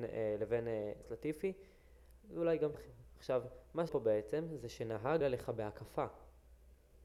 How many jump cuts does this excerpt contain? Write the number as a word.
four